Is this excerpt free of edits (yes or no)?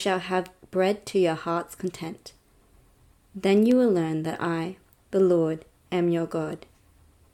yes